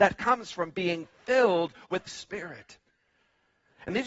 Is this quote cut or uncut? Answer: cut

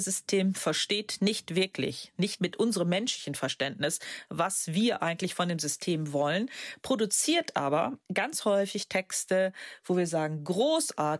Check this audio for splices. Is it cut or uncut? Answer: uncut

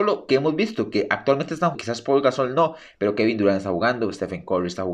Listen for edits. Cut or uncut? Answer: cut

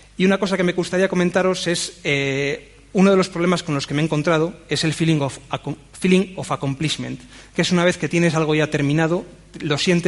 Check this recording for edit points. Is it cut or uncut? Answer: uncut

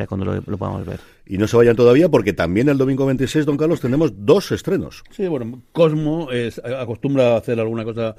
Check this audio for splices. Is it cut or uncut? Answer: uncut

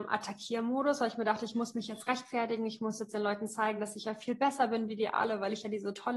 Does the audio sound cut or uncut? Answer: uncut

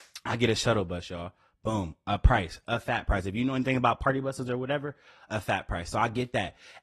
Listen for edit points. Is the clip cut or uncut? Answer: uncut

